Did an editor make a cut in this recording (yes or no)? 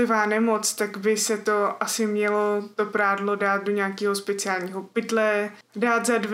no